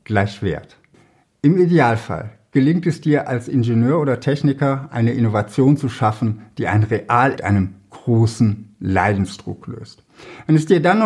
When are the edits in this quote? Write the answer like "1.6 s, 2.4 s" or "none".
7.4 s